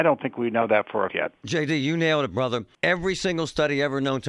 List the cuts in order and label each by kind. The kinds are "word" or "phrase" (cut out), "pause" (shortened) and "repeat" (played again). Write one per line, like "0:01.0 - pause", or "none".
0:01.1 - word
0:02.7 - pause